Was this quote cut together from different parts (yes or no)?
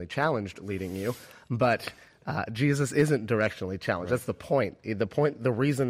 no